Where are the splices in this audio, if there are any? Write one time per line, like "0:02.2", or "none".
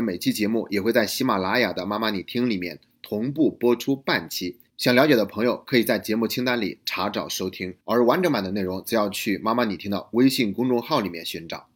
0:04.7
0:07.8